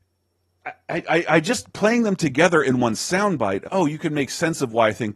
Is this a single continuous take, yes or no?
no